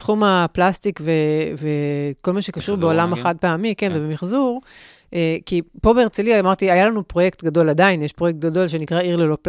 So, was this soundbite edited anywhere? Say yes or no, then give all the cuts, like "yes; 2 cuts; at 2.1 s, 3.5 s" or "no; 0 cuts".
no; 0 cuts